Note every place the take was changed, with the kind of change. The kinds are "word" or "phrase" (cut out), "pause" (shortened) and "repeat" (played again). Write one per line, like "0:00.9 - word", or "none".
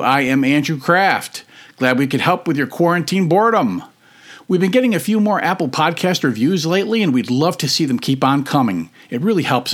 none